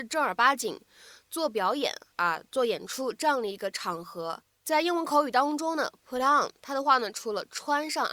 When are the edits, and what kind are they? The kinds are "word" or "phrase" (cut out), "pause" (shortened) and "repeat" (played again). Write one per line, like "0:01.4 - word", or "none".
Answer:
none